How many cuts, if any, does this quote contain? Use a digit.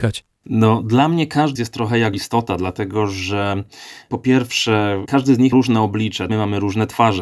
4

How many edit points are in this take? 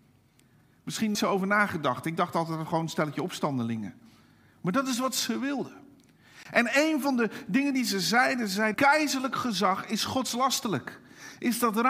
2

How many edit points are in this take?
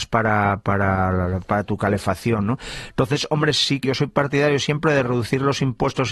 2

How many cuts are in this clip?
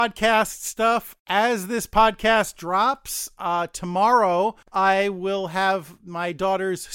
1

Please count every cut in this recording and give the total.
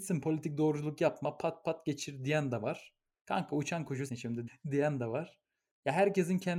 3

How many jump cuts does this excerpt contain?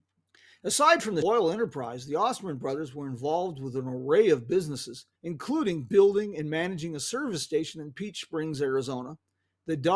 2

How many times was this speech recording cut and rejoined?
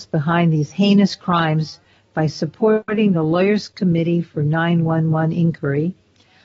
0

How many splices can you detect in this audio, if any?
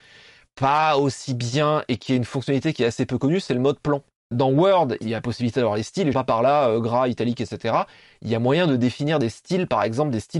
1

